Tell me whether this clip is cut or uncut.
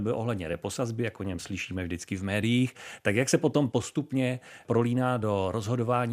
uncut